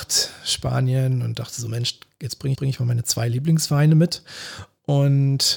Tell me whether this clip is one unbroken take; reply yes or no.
no